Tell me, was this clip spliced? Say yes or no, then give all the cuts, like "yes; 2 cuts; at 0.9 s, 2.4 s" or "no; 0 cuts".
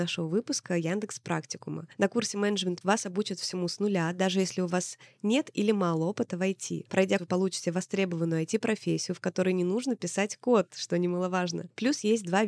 yes; 2 cuts; at 2.8 s, 7.2 s